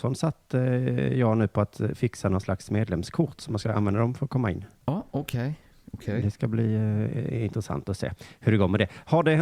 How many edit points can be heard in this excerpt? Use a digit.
0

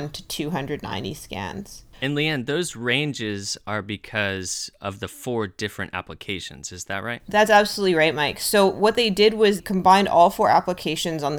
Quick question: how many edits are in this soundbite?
2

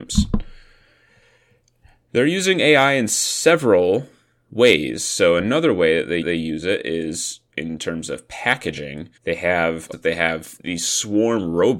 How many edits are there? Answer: 3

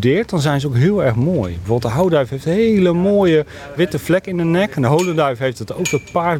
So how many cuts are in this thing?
1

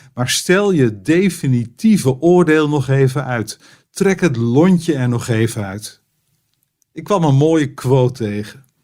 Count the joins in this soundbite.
0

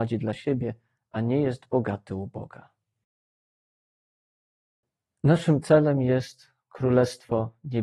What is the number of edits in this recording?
0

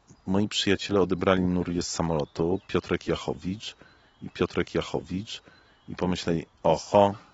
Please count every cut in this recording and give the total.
1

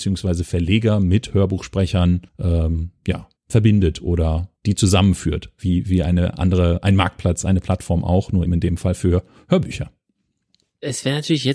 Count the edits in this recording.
4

